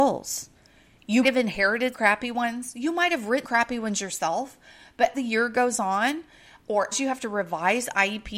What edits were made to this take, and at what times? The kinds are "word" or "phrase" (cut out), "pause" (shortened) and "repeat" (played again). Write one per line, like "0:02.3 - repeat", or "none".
0:01.2 - word
0:01.9 - word
0:03.4 - word
0:05.1 - word
0:06.9 - word